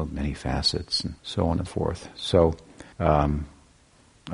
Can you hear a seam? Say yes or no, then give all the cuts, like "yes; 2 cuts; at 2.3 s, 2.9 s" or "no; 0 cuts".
yes; 3 cuts; at 1.2 s, 1.7 s, 2.9 s